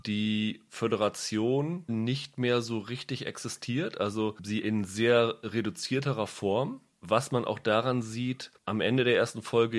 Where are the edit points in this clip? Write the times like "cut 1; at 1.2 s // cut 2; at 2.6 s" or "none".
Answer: cut 1; at 1.9 s // cut 2; at 4.6 s